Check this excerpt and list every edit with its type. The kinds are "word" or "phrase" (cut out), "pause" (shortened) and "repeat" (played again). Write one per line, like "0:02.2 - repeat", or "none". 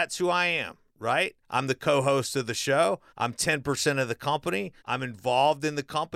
0:01.4 - pause
0:03.1 - pause
0:04.8 - pause